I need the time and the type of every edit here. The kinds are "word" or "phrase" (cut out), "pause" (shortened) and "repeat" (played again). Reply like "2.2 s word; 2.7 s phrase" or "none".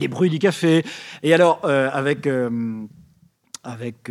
none